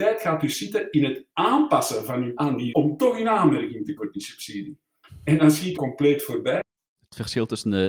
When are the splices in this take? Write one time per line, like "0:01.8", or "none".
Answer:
0:01.3
0:02.4
0:02.7
0:04.0
0:05.8

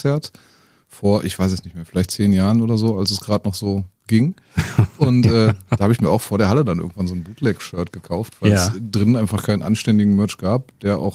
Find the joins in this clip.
0:04.0

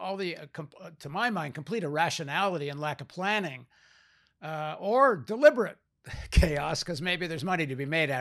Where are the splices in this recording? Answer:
none

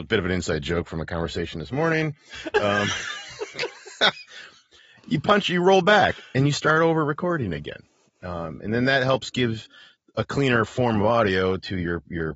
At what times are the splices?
none

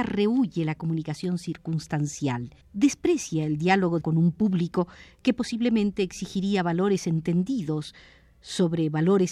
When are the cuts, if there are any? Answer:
0:02.6
0:04.0

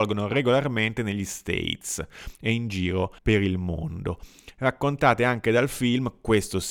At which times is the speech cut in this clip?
0:03.2

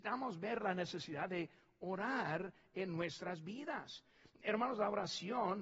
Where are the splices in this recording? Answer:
none

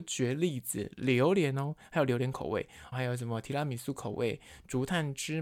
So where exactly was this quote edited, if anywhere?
0:02.9

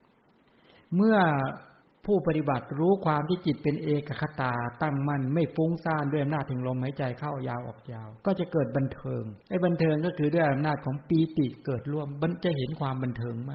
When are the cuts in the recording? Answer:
0:01.8
0:08.2
0:09.4

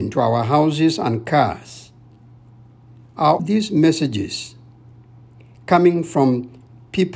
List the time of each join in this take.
0:03.4

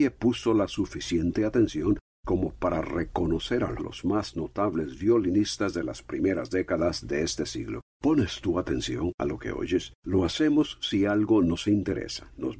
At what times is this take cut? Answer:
0:03.8
0:07.9
0:10.0

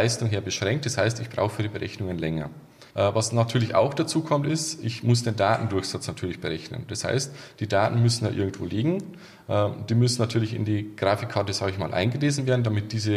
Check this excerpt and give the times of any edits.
0:02.9

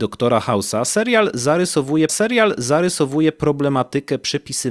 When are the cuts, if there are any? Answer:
0:02.1

